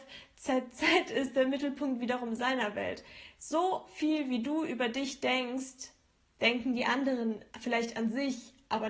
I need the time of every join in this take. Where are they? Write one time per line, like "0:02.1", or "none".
0:07.5

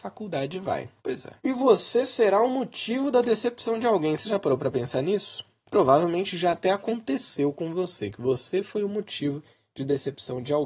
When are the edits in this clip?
0:01.0
0:01.4

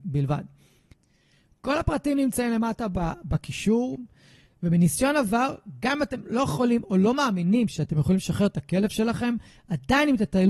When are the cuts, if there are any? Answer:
none

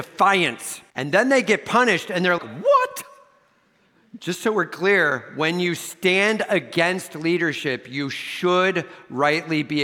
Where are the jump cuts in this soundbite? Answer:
0:00.9
0:02.4

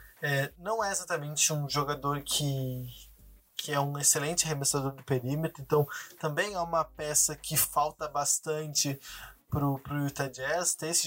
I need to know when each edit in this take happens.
none

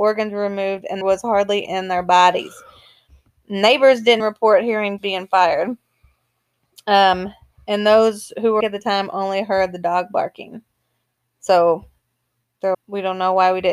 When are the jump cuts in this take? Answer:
0:01.0
0:01.6
0:04.2
0:05.0
0:08.6
0:12.7

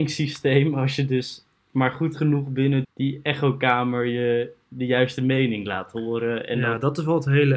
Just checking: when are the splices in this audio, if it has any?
0:02.8

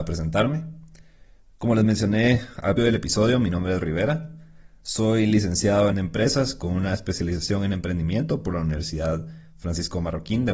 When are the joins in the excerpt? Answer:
0:02.8
0:03.8
0:05.9

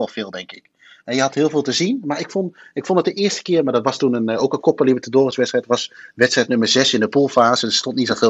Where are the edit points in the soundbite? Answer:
none

